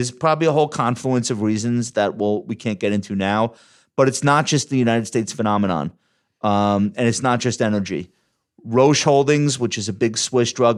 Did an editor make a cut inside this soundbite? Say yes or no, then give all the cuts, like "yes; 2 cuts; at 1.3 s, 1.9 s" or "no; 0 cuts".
no; 0 cuts